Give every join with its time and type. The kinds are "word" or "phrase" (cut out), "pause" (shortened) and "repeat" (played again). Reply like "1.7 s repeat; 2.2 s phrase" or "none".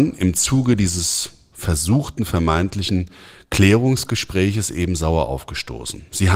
none